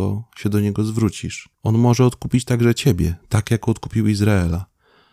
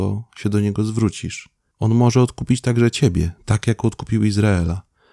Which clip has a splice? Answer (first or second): first